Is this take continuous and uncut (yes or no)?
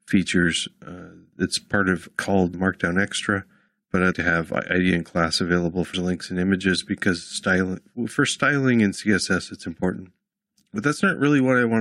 no